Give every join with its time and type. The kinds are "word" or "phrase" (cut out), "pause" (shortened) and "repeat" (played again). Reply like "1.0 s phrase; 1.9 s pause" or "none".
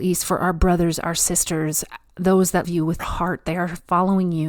2.6 s word; 3.0 s word